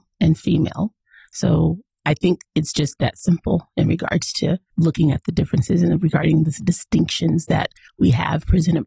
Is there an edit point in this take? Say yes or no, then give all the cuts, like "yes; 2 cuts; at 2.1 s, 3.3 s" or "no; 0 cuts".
no; 0 cuts